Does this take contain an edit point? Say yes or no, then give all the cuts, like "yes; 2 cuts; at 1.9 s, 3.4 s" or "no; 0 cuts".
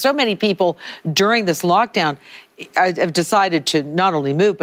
no; 0 cuts